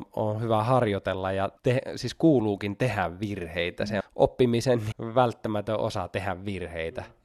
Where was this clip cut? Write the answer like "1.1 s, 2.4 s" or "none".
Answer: 1.6 s, 4.0 s, 4.9 s